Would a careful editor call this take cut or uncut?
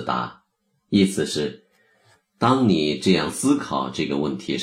uncut